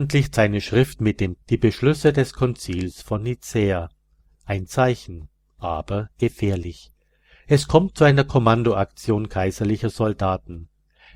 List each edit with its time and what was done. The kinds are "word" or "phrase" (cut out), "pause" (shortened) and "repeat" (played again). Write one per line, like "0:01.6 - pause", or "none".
0:01.4 - word
0:04.7 - word